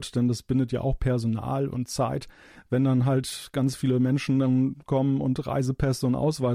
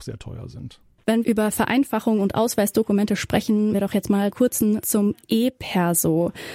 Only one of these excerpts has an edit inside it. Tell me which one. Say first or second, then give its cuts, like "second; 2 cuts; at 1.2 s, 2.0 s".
second; 4 cuts; at 1.2 s, 3.7 s, 4.3 s, 4.8 s